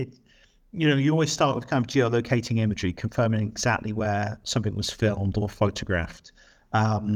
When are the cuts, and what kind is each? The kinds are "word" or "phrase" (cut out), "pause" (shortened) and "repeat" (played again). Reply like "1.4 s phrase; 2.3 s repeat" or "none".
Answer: none